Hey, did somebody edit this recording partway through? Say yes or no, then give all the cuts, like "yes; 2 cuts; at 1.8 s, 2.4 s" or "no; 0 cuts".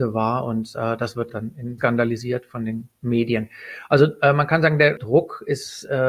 yes; 2 cuts; at 1.3 s, 1.8 s